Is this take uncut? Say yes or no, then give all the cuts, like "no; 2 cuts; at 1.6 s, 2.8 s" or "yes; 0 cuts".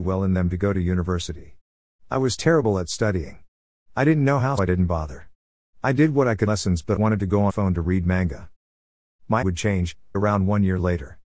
no; 6 cuts; at 4.6 s, 6.5 s, 7.0 s, 7.5 s, 9.4 s, 10.1 s